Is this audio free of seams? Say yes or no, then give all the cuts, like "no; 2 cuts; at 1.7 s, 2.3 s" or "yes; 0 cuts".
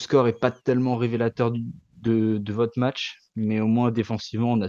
yes; 0 cuts